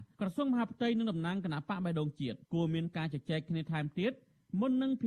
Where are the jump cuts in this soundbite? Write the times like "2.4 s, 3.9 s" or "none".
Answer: 2.4 s